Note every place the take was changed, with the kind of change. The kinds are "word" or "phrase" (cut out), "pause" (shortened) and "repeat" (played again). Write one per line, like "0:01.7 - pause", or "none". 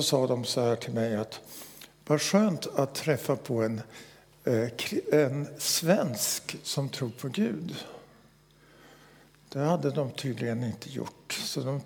none